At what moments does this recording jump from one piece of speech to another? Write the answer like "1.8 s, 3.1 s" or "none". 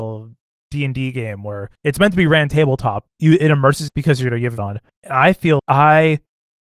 1.7 s, 3.1 s, 3.9 s, 4.6 s, 4.9 s, 5.6 s